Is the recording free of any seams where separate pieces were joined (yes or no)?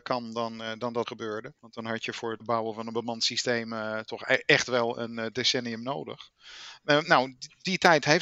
no